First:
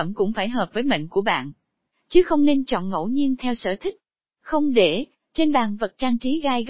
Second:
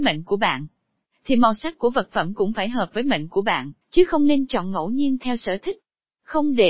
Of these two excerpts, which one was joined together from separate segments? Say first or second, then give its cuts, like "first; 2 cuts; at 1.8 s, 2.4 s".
second; 1 cut; at 3.8 s